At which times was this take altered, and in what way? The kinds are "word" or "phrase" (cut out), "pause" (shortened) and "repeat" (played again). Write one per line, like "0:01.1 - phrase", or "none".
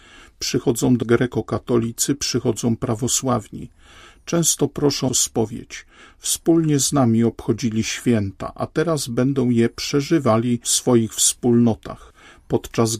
0:01.0 - word
0:05.1 - word